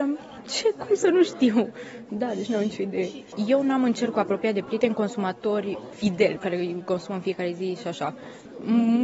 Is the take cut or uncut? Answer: uncut